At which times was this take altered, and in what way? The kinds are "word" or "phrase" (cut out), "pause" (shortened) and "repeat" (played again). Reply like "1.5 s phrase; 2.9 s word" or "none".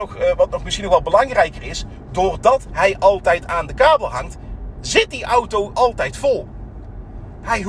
5.7 s word